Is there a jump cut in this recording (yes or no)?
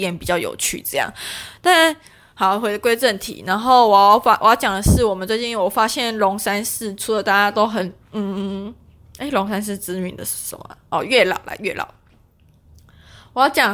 no